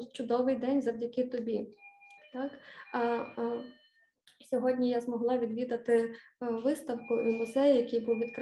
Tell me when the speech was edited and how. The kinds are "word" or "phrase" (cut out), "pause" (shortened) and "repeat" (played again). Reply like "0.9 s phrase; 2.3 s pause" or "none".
none